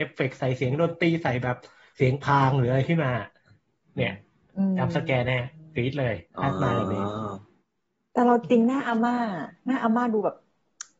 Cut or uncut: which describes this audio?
uncut